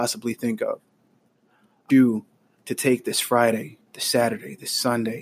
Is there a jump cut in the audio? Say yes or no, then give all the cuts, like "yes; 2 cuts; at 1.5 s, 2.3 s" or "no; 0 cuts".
yes; 2 cuts; at 1.9 s, 3.8 s